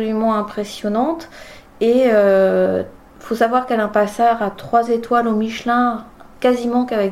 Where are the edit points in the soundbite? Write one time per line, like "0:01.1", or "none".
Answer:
none